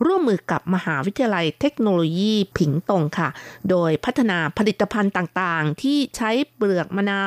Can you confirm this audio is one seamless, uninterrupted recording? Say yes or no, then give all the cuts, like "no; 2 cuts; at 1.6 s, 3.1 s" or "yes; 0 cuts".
no; 1 cut; at 2.5 s